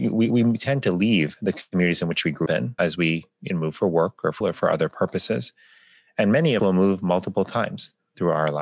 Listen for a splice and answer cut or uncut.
cut